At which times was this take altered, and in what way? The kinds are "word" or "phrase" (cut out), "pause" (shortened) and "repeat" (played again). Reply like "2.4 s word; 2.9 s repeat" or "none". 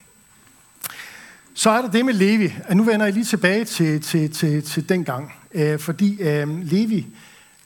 none